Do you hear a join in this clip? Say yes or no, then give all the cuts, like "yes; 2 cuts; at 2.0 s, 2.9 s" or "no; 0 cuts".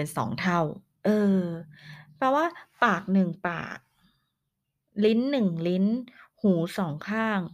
yes; 1 cut; at 1.0 s